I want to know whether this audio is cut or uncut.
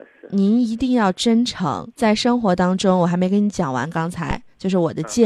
cut